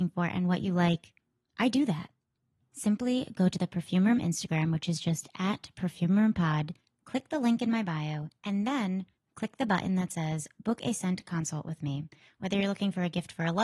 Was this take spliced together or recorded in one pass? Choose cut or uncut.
uncut